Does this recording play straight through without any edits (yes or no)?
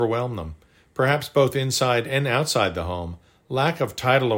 yes